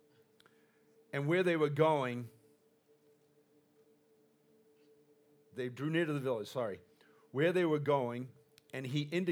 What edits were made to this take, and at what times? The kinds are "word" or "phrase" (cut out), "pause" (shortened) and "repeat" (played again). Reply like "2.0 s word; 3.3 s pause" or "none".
none